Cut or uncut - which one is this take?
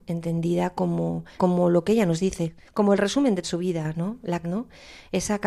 cut